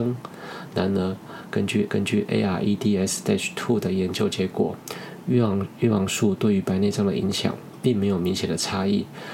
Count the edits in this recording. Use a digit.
1